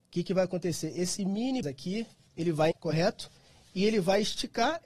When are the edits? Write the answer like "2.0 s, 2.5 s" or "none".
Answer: 1.6 s, 2.2 s, 2.7 s